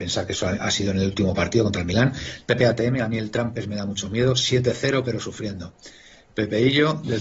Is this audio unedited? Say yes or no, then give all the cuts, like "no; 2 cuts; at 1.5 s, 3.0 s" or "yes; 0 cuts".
yes; 0 cuts